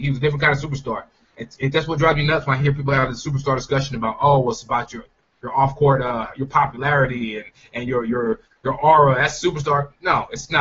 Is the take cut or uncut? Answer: uncut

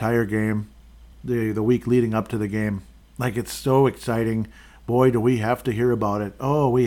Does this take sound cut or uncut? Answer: uncut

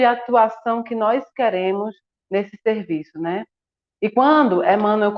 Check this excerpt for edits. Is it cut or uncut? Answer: uncut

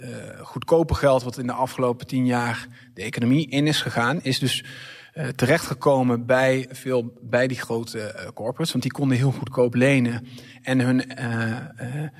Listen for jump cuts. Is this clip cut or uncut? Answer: uncut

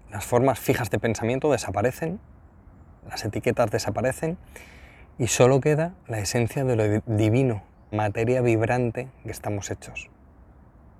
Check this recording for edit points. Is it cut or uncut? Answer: cut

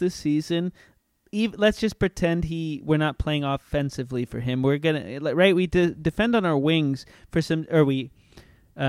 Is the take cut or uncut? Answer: uncut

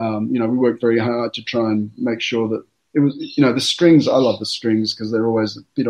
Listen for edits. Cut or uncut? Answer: uncut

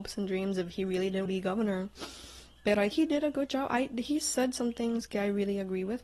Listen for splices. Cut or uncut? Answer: cut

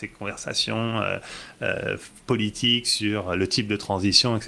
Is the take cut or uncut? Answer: uncut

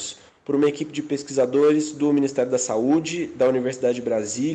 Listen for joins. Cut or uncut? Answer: uncut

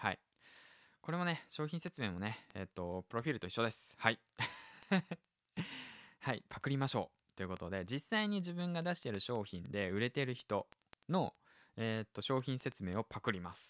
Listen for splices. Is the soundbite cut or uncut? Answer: uncut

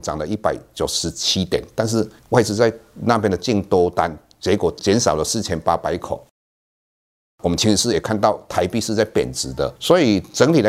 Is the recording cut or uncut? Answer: cut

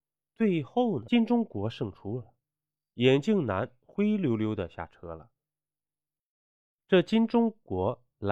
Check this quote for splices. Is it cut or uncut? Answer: uncut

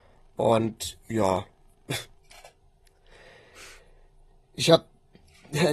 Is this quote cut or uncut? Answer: uncut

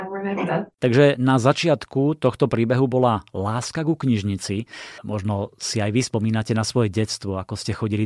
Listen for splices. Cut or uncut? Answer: cut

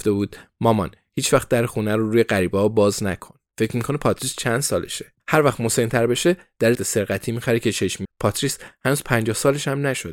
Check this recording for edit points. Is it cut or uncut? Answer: cut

